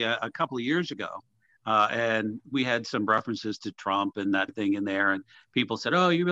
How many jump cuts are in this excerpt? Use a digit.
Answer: 1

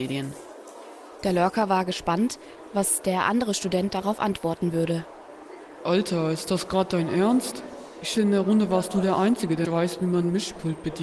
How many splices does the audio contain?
2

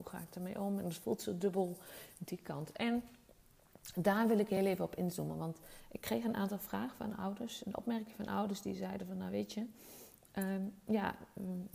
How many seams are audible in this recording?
0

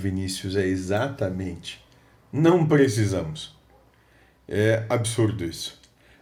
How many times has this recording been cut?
0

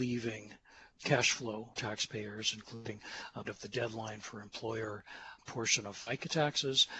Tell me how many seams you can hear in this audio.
2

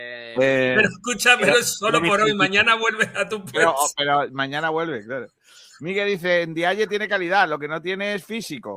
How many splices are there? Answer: 0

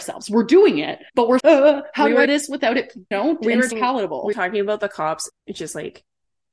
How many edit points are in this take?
7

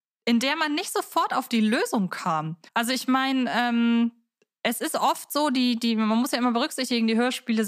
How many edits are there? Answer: 1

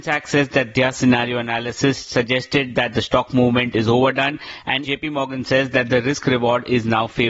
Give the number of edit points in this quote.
1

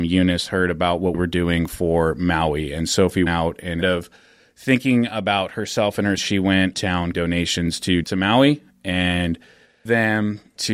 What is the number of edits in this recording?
8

